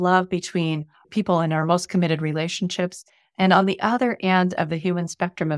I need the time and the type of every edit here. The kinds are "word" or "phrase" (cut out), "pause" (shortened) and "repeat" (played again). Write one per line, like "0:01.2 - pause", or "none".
none